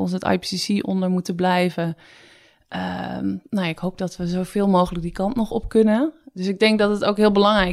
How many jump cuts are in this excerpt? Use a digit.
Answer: 0